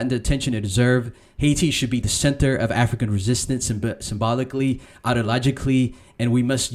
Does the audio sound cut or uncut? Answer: uncut